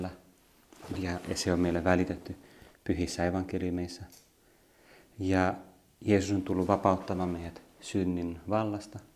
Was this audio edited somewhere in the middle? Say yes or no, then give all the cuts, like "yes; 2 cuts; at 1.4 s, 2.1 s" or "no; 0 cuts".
no; 0 cuts